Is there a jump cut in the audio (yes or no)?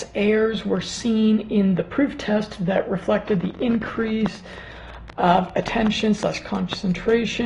no